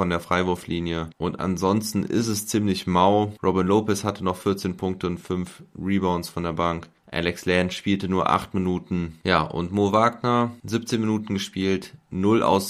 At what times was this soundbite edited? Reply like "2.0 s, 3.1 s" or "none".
none